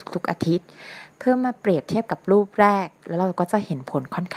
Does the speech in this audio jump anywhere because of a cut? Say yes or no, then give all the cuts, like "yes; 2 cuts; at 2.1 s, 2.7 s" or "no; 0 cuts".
no; 0 cuts